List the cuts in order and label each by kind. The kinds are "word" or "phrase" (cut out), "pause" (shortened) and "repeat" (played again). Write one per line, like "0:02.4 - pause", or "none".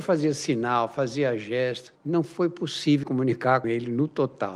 0:02.0 - pause
0:03.0 - word
0:03.6 - word